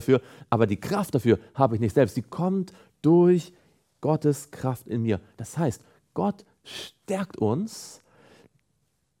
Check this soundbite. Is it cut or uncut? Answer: uncut